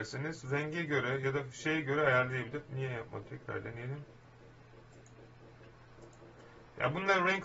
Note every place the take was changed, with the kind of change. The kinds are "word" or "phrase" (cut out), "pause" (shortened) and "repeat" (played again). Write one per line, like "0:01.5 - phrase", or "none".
0:03.2 - word